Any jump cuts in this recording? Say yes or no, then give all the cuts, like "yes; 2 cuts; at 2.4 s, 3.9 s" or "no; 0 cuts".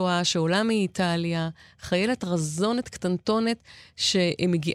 no; 0 cuts